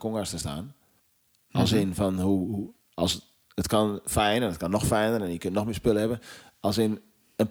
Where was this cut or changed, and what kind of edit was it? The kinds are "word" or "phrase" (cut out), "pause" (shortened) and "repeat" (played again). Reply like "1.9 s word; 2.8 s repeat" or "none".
1.0 s pause